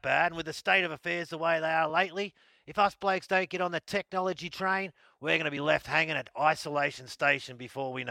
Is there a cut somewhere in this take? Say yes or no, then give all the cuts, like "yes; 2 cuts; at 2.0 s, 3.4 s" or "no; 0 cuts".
no; 0 cuts